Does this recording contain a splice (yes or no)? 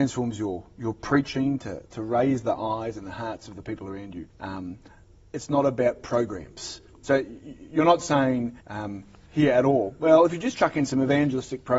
yes